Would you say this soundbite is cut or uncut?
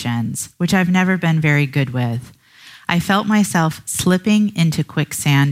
uncut